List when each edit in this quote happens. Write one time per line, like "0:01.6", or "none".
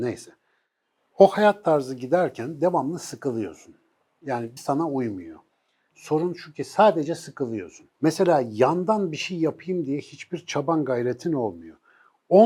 0:04.6
0:05.9
0:07.9